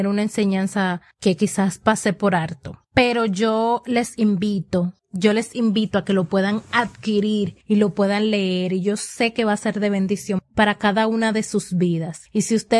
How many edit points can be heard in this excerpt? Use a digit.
4